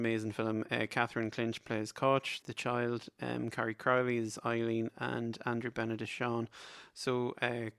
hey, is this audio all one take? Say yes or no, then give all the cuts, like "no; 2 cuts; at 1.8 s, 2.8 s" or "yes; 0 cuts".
no; 1 cut; at 2.4 s